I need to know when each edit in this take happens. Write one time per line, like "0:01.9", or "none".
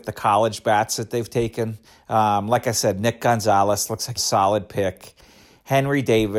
0:01.8
0:04.2